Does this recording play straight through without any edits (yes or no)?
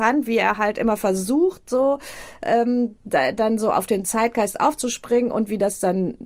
yes